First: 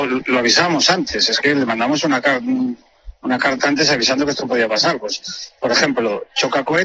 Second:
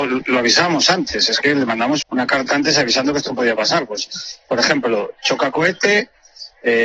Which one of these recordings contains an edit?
second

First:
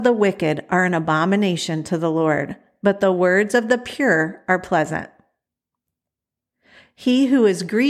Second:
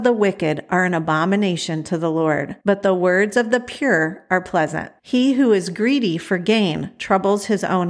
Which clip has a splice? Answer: second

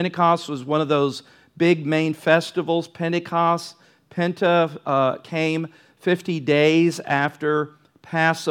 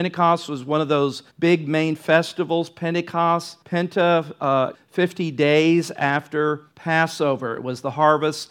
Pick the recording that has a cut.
second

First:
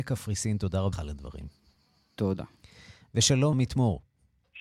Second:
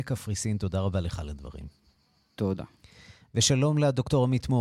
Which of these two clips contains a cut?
first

